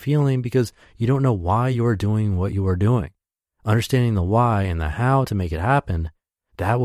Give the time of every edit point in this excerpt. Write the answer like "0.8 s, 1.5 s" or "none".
none